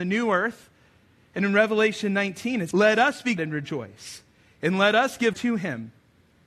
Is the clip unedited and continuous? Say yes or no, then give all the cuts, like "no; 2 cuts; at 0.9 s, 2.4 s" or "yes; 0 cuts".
no; 3 cuts; at 2.7 s, 3.4 s, 5.3 s